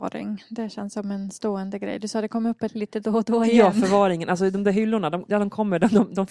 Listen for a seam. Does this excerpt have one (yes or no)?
yes